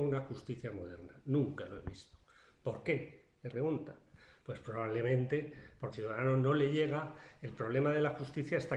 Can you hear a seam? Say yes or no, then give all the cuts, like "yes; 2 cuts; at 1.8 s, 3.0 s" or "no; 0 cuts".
yes; 2 cuts; at 3.5 s, 5.9 s